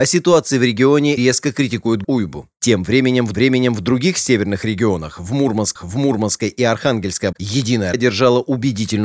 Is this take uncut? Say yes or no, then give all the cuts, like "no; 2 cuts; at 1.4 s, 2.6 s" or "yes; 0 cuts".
no; 6 cuts; at 1.2 s, 2.0 s, 3.3 s, 5.8 s, 7.3 s, 7.9 s